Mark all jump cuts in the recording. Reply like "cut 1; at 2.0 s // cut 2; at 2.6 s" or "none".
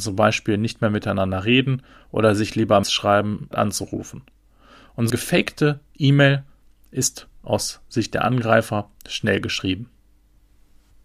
cut 1; at 2.8 s // cut 2; at 3.5 s // cut 3; at 5.1 s